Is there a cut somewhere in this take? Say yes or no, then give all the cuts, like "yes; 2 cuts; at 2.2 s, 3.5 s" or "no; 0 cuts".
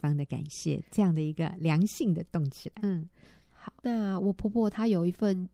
yes; 2 cuts; at 2.8 s, 3.8 s